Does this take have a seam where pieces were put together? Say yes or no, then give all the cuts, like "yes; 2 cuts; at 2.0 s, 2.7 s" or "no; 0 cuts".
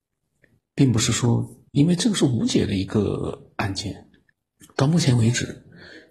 yes; 2 cuts; at 1.7 s, 4.3 s